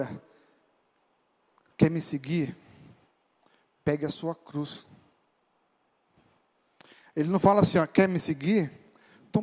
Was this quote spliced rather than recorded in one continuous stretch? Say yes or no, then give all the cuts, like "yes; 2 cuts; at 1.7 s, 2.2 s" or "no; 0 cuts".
no; 0 cuts